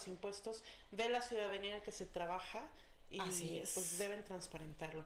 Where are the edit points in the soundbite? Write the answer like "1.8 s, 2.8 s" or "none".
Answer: none